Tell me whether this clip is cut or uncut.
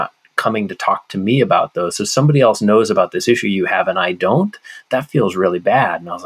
uncut